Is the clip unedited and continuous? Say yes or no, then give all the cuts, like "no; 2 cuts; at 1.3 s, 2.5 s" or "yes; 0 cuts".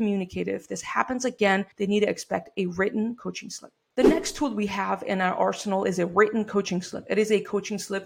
no; 2 cuts; at 1.7 s, 3.8 s